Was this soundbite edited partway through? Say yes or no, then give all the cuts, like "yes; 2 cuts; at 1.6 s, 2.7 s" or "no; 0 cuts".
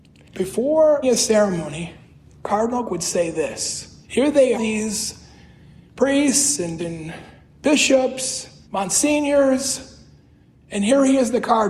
yes; 6 cuts; at 1.0 s, 2.9 s, 4.0 s, 4.5 s, 6.8 s, 8.6 s